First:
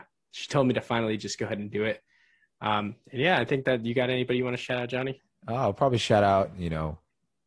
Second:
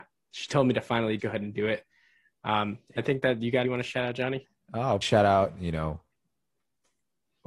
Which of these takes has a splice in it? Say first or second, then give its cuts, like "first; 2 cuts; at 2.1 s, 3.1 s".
second; 4 cuts; at 1.2 s, 3.0 s, 3.6 s, 5.0 s